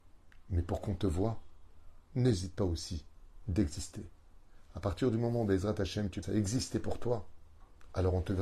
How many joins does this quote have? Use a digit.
1